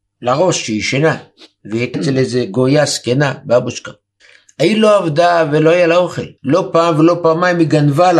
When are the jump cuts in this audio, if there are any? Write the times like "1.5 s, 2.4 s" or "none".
1.4 s, 1.9 s, 4.2 s, 6.4 s